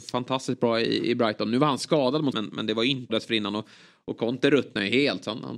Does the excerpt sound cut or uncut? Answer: cut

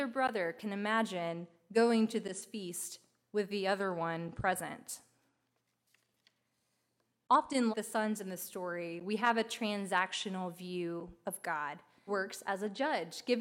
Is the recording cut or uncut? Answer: cut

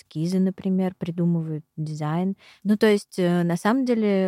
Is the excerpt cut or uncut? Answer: uncut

